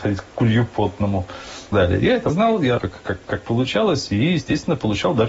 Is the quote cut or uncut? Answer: cut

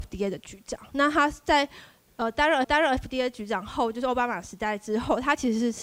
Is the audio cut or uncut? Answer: cut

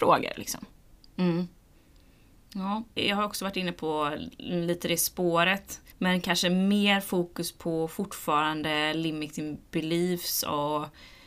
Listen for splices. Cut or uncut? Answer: cut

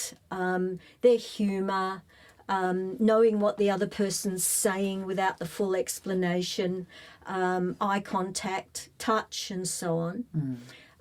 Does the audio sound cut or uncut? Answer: uncut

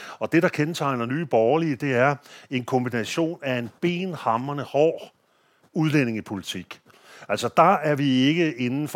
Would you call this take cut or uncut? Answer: uncut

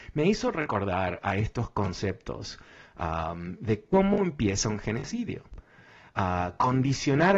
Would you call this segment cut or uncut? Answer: uncut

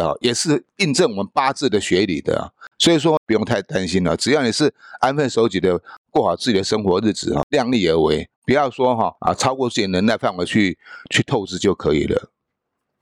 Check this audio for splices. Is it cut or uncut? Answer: cut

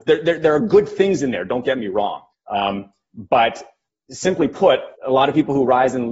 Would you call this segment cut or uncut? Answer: cut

